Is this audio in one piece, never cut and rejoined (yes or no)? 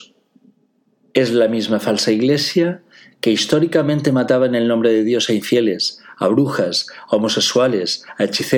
yes